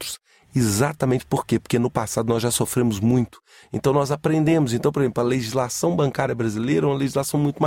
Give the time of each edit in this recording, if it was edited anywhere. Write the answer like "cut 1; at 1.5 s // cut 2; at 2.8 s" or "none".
none